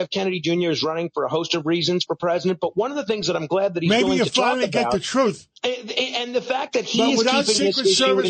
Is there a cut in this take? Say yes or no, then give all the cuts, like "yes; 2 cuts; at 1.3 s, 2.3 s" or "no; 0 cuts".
yes; 1 cut; at 5.6 s